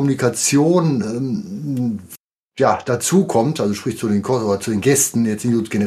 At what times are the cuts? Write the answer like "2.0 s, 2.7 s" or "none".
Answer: none